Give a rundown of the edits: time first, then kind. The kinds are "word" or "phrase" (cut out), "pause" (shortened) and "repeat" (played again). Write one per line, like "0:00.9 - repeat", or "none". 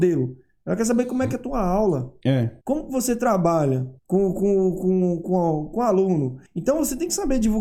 0:02.6 - pause
0:04.0 - pause
0:06.5 - pause